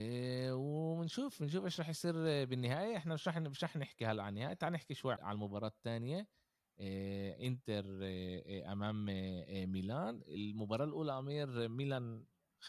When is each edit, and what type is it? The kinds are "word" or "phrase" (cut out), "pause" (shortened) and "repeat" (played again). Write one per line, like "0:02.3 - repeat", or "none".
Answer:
0:05.2 - word